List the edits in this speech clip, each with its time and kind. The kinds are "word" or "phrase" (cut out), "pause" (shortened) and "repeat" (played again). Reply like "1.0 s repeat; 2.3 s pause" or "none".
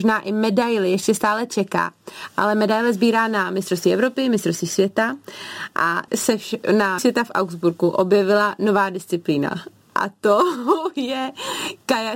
6.1 s word; 7.0 s word